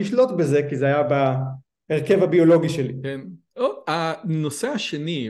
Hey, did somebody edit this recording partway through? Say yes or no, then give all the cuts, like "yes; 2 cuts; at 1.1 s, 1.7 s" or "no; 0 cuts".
no; 0 cuts